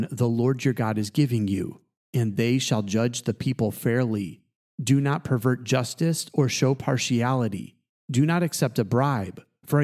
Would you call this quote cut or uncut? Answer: uncut